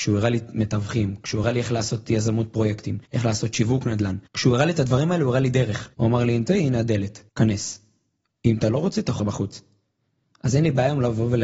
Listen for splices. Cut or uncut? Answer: cut